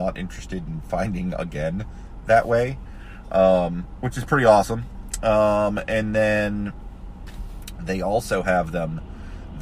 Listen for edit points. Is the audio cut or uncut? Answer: uncut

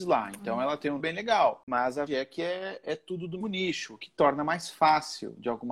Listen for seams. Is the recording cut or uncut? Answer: cut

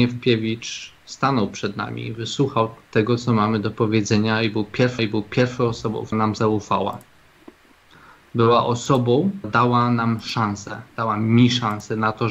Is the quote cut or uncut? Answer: cut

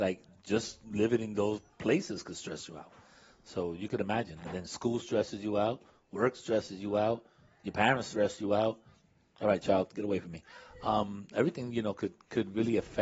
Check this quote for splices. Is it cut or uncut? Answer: uncut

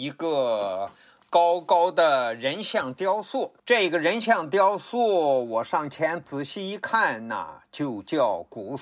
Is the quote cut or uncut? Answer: cut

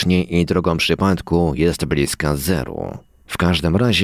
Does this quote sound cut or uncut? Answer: uncut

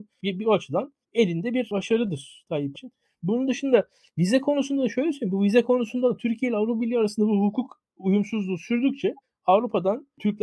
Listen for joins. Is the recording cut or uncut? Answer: cut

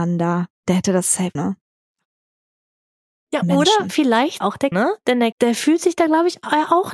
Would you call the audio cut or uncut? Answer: cut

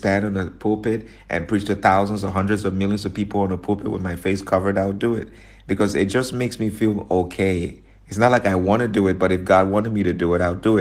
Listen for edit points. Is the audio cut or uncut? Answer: uncut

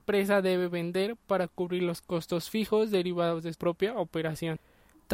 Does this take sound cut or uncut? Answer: cut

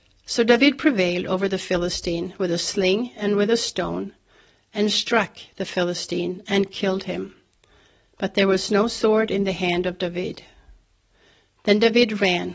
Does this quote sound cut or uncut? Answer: uncut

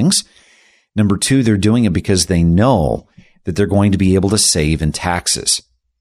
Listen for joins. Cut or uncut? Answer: uncut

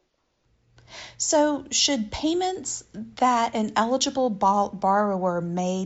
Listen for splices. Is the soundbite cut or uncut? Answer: uncut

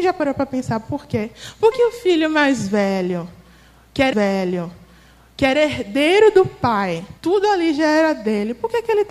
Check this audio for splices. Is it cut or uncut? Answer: cut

